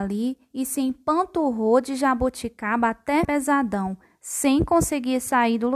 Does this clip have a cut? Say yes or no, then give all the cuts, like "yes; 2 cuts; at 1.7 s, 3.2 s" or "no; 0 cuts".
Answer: yes; 1 cut; at 3.2 s